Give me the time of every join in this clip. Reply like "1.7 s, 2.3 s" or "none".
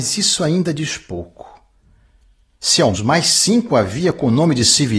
2.9 s